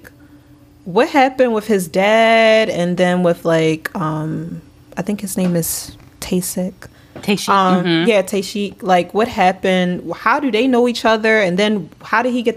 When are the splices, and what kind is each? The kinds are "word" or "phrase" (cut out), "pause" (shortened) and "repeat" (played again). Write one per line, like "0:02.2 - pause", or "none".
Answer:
none

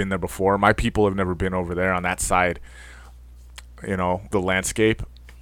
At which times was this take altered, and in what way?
0:04.3 - word

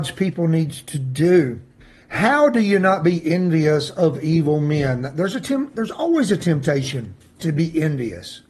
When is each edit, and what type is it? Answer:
0:01.8 - pause
0:07.2 - pause

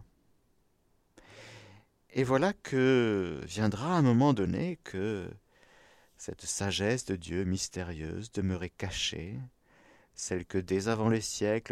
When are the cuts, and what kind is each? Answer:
none

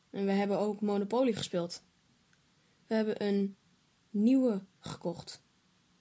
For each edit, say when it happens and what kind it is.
none

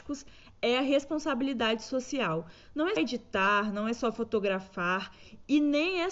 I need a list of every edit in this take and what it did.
0:03.0 - word

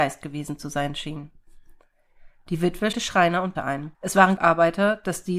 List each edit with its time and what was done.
0:02.9 - word
0:03.6 - word
0:03.9 - pause
0:04.4 - word

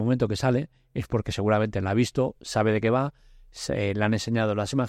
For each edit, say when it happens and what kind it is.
none

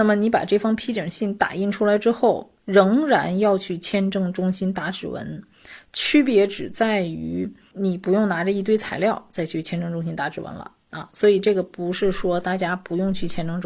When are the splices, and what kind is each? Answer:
0:07.7 - word

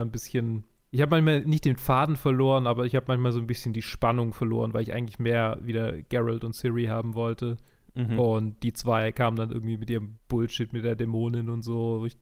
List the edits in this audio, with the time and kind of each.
none

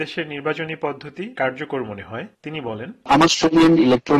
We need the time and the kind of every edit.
0:01.4 - word
0:03.3 - word

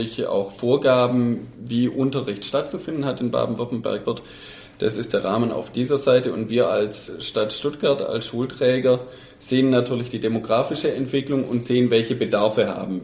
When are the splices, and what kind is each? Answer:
0:04.0 - phrase

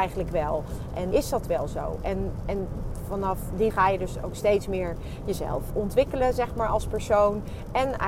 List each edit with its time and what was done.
0:01.1 - word
0:03.7 - word
0:05.7 - word

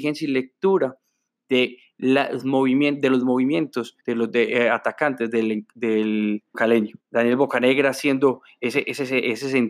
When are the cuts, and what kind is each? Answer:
0:04.0 - pause
0:06.5 - word
0:07.0 - pause

